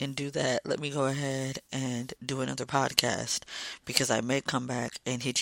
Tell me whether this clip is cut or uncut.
uncut